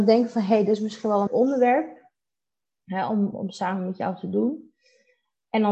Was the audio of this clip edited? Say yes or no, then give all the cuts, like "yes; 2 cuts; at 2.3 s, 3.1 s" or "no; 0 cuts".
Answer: yes; 2 cuts; at 1.3 s, 3.3 s